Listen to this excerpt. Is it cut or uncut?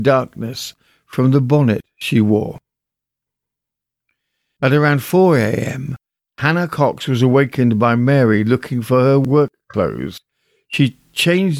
uncut